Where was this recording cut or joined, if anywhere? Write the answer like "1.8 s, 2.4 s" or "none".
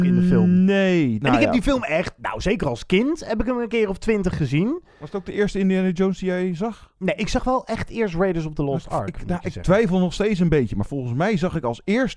none